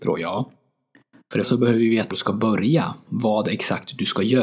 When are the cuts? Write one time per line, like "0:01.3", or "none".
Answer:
0:01.4
0:02.1
0:03.1